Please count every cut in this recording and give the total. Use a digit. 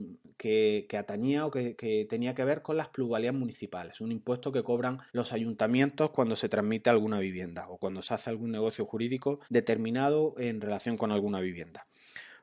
2